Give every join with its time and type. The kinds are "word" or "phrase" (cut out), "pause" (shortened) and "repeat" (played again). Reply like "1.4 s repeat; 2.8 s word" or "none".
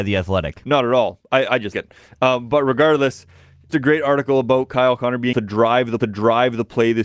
1.7 s word; 3.7 s word; 5.3 s word; 6.0 s repeat

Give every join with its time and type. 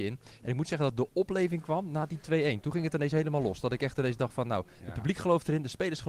none

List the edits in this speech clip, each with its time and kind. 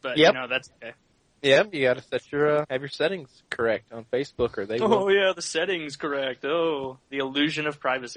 2.6 s word

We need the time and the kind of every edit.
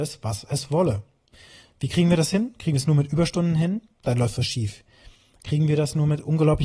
none

